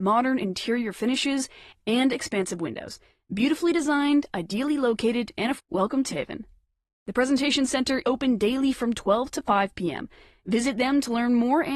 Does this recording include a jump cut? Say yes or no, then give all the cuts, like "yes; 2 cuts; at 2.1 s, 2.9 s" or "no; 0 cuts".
yes; 3 cuts; at 5.6 s, 6.1 s, 8.0 s